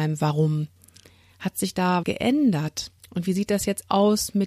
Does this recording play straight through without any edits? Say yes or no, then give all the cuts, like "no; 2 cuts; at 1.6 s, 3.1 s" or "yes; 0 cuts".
no; 2 cuts; at 2.0 s, 3.0 s